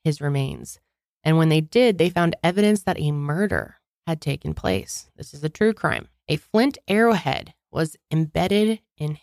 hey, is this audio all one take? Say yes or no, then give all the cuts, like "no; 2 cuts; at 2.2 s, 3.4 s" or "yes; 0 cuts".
yes; 0 cuts